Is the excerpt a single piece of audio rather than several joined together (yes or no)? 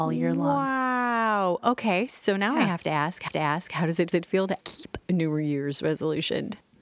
no